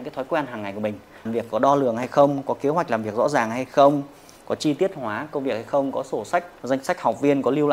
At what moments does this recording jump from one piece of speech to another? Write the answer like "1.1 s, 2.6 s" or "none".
1.3 s, 6.6 s

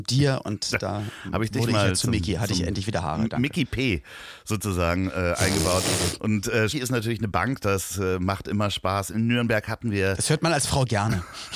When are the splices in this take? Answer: 6.7 s

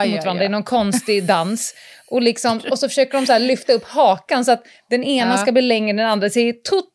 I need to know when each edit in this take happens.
none

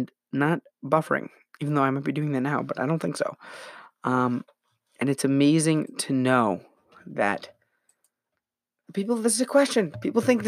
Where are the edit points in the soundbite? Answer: none

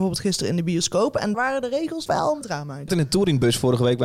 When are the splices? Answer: 1.3 s, 2.1 s, 2.4 s, 2.9 s

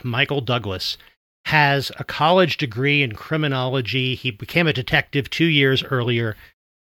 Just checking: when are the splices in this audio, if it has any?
none

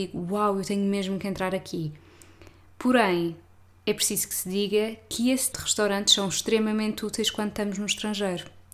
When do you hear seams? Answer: 5.5 s

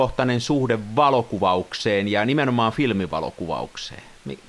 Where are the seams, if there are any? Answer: none

